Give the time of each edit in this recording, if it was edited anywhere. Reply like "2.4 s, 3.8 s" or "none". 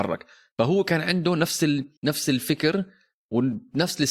2.0 s